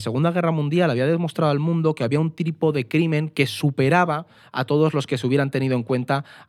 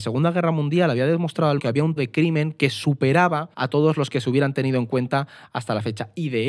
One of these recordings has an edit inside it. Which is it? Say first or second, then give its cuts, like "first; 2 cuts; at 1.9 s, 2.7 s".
second; 3 cuts; at 1.6 s, 2.0 s, 3.5 s